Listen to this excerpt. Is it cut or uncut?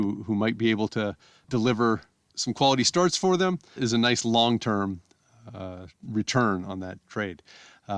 cut